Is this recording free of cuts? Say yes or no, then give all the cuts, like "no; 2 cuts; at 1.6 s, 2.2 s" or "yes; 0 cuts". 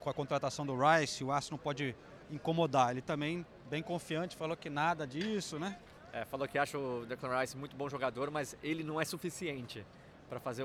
yes; 0 cuts